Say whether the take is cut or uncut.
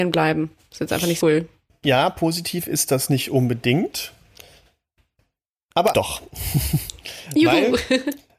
cut